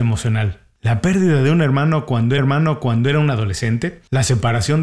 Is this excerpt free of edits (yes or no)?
no